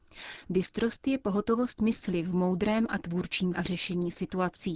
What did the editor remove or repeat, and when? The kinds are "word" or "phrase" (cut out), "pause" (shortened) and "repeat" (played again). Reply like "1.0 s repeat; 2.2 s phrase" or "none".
3.5 s word